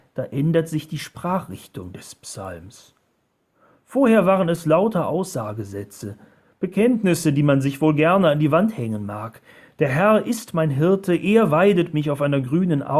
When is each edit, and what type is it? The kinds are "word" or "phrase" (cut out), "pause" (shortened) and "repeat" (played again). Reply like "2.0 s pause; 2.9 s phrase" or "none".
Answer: none